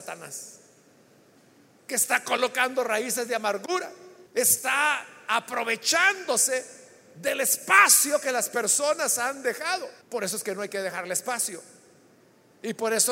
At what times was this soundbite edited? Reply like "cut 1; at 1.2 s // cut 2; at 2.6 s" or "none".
cut 1; at 4.3 s // cut 2; at 10.0 s